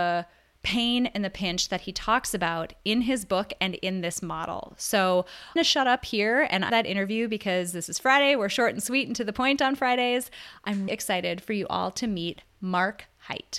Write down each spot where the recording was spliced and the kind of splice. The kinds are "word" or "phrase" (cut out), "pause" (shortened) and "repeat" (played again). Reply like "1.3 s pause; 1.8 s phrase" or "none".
5.6 s phrase; 6.7 s phrase; 10.9 s word